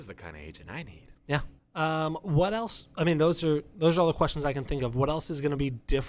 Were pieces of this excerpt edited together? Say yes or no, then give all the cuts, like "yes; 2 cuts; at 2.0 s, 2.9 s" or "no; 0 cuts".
yes; 1 cut; at 1.6 s